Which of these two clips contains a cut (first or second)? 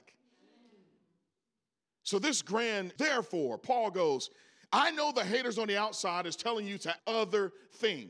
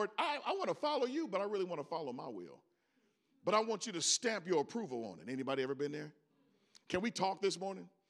first